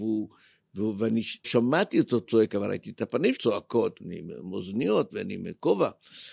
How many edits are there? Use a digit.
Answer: 3